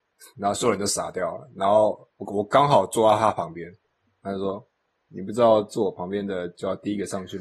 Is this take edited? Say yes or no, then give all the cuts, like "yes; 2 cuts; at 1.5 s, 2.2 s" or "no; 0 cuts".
no; 0 cuts